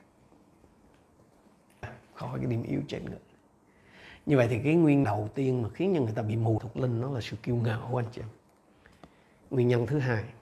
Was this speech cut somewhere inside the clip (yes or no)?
yes